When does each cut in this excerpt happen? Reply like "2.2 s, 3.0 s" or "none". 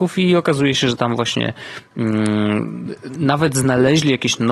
none